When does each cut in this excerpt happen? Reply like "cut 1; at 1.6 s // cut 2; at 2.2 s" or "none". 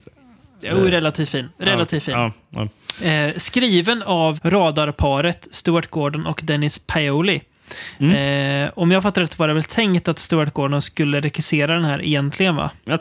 cut 1; at 4.4 s

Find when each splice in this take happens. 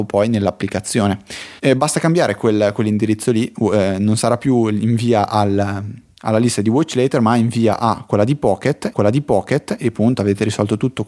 cut 1; at 1.6 s // cut 2; at 8.9 s

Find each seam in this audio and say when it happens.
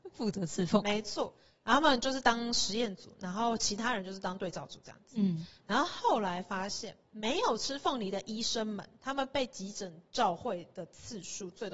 cut 1; at 7.1 s

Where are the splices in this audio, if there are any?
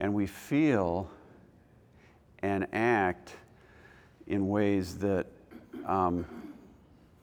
none

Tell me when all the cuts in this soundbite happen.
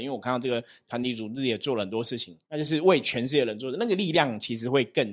cut 1; at 2.4 s

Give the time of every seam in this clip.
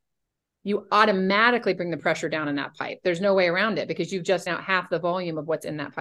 cut 1; at 4.5 s

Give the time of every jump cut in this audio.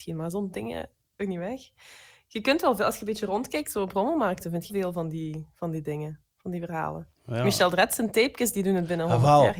cut 1; at 1.2 s // cut 2; at 4.7 s // cut 3; at 7.2 s

